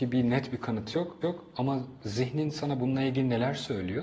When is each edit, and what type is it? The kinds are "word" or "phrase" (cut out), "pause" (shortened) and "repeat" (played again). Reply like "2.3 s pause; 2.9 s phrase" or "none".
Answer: 1.2 s repeat